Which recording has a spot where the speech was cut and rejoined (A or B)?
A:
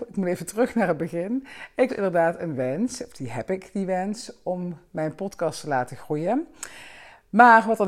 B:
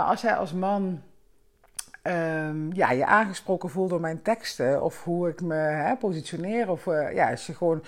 A